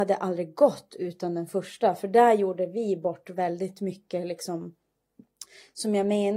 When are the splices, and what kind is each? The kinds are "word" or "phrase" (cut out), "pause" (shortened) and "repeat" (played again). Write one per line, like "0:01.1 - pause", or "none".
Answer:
none